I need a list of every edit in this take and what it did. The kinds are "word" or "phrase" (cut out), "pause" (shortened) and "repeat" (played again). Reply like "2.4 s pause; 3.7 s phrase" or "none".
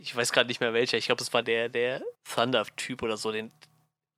1.4 s word; 2.1 s pause